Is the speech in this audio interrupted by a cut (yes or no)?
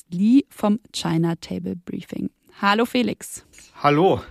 no